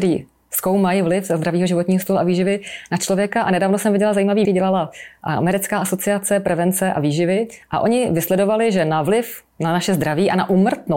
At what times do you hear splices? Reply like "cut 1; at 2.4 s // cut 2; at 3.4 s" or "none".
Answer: cut 1; at 4.4 s // cut 2; at 9.5 s